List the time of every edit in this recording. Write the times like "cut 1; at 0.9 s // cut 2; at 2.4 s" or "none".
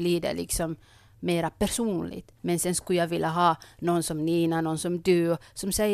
cut 1; at 2.4 s